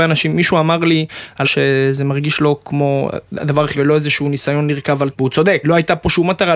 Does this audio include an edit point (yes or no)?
yes